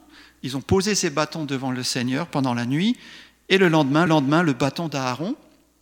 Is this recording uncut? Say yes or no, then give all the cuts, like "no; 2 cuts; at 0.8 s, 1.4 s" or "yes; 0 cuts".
no; 1 cut; at 4.1 s